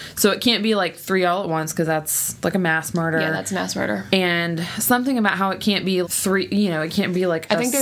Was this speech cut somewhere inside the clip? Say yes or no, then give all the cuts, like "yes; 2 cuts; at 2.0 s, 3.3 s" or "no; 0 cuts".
yes; 1 cut; at 6.0 s